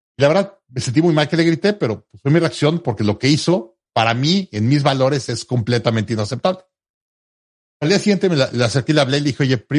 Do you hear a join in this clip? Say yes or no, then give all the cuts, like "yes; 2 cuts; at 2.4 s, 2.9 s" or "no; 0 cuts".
no; 0 cuts